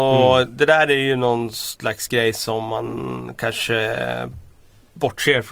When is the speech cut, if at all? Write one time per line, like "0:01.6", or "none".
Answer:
none